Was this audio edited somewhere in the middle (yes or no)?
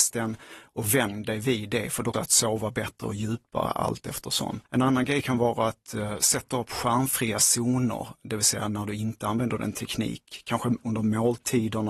yes